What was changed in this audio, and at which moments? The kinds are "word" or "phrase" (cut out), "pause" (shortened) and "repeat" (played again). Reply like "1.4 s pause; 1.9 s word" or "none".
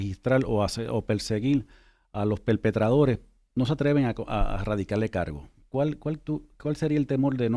none